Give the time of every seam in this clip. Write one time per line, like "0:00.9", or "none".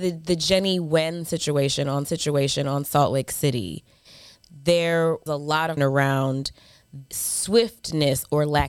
0:02.0
0:05.3
0:05.8
0:07.1